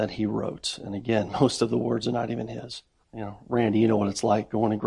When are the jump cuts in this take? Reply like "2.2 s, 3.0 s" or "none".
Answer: 3.0 s